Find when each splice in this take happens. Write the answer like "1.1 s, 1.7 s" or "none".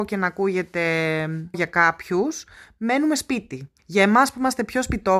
1.5 s, 3.8 s